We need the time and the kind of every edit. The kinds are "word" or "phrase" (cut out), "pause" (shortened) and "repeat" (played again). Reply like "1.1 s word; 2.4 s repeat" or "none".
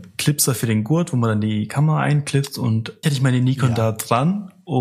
3.0 s word